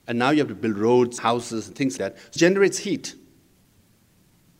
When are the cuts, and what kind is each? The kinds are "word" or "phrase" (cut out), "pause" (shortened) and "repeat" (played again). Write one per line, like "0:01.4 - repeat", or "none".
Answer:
0:01.2 - word
0:02.0 - word
0:02.4 - word

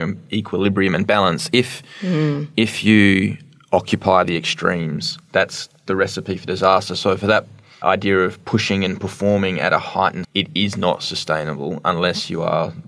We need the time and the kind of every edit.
0:07.8 - word
0:10.2 - word

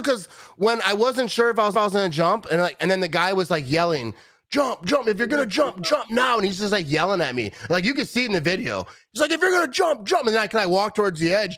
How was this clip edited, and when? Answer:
0:01.7 - repeat

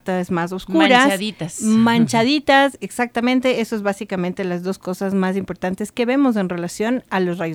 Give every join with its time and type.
none

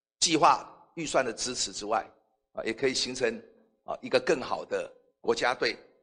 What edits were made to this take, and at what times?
none

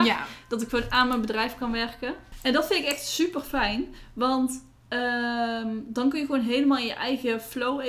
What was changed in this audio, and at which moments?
none

